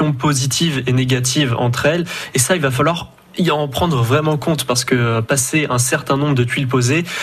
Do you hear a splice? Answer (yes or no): no